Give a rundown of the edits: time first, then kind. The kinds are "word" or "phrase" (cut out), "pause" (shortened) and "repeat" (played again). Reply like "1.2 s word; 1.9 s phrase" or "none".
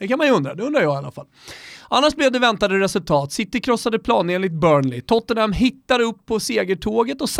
none